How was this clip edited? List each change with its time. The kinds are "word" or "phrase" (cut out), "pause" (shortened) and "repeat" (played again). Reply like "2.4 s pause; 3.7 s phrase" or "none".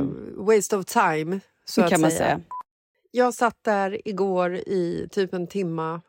none